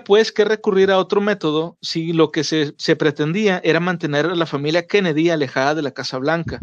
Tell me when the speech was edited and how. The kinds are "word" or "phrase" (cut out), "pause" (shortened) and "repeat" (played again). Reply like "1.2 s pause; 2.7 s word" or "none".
none

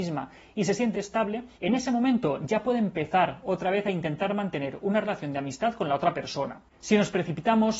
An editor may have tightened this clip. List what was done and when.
0.9 s word; 1.5 s pause

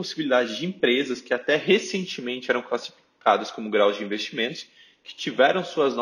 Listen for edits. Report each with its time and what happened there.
none

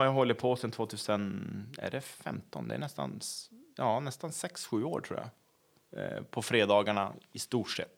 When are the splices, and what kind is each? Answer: none

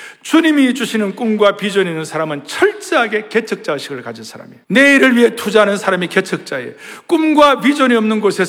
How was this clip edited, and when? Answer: 4.6 s pause

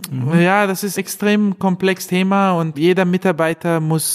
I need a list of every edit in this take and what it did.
0.9 s word; 2.1 s word; 2.7 s word

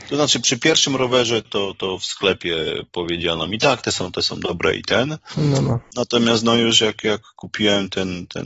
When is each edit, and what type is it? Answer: none

